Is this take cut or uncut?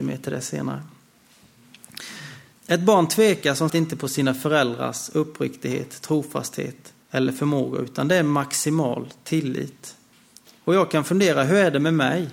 cut